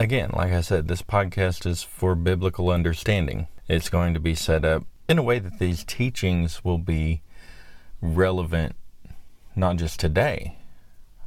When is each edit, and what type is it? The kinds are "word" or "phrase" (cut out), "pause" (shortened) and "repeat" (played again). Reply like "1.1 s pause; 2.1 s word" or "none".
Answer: none